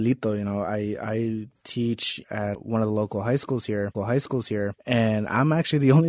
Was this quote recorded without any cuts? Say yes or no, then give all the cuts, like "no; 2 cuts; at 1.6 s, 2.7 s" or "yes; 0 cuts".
no; 3 cuts; at 2.2 s, 2.5 s, 3.9 s